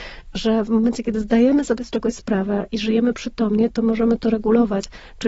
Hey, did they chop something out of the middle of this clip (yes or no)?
no